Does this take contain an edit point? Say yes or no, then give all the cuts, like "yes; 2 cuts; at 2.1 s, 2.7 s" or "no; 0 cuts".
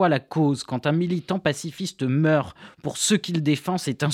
no; 0 cuts